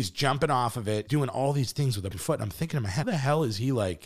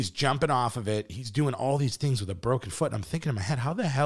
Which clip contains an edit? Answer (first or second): first